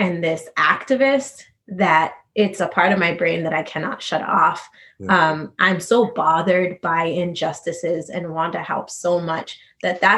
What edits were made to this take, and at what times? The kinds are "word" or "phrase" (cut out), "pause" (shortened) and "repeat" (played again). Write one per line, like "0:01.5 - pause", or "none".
0:02.6 - phrase